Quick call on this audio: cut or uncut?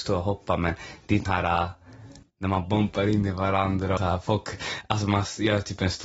cut